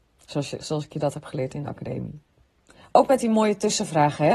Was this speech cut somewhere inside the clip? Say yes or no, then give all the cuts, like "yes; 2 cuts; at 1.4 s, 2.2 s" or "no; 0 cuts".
no; 0 cuts